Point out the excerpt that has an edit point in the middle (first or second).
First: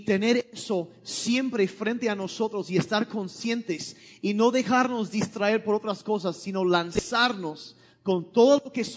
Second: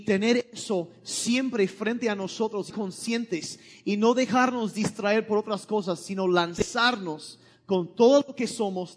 second